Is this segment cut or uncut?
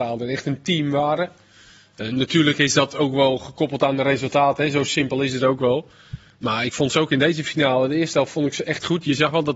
uncut